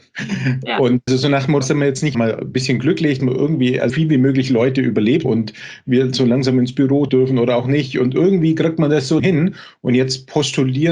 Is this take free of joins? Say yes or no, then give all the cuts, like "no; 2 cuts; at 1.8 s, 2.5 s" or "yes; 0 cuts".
no; 8 cuts; at 1.1 s, 1.6 s, 2.1 s, 3.2 s, 3.9 s, 5.2 s, 7.1 s, 9.2 s